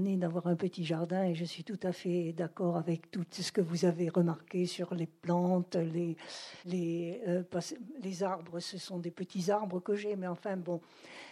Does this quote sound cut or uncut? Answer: cut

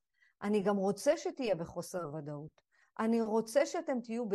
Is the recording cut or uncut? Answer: uncut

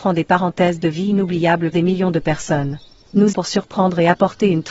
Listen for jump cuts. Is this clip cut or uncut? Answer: cut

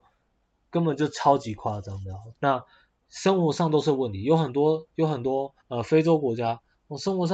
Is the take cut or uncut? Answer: cut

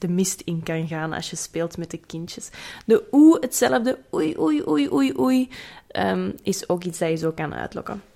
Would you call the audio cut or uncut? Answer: uncut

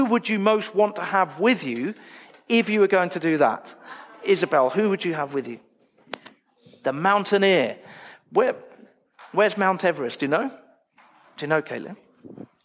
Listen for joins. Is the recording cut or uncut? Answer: uncut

